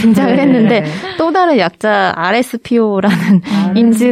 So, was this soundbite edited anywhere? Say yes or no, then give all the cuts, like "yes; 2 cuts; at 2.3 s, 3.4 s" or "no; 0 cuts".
no; 0 cuts